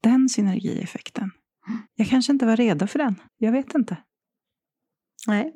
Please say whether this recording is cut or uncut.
cut